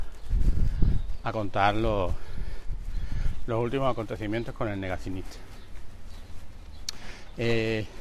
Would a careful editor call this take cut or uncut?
uncut